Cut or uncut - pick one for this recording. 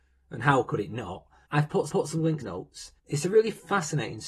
cut